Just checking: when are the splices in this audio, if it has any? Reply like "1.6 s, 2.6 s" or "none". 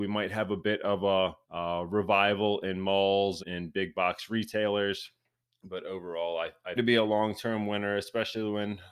1.4 s, 3.4 s, 5.4 s, 6.8 s